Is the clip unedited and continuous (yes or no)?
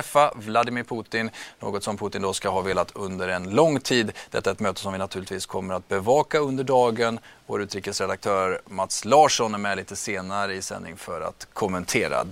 yes